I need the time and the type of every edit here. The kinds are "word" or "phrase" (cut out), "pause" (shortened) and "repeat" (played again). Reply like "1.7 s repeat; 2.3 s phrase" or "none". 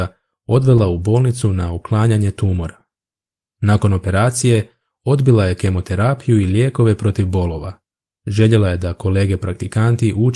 none

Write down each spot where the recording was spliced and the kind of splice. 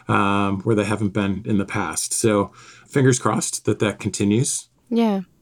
none

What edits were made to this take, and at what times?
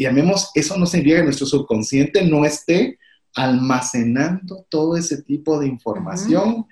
none

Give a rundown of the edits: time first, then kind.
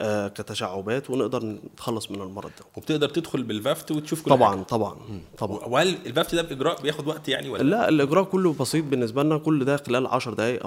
none

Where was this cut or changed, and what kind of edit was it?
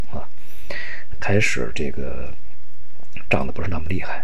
1.1 s word

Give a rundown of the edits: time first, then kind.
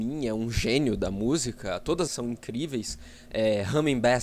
2.1 s phrase

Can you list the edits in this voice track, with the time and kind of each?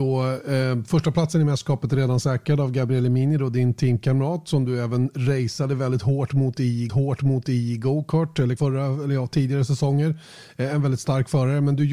6.9 s repeat; 8.6 s word

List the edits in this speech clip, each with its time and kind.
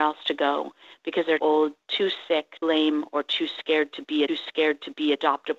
1.4 s word; 2.6 s word; 4.3 s repeat

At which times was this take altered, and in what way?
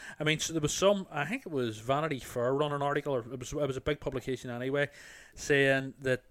none

